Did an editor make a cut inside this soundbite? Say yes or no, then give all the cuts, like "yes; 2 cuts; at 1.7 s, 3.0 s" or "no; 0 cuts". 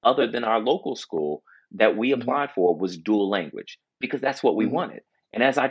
no; 0 cuts